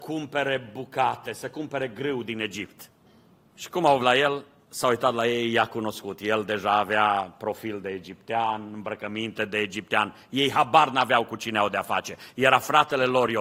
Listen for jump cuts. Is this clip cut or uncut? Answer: cut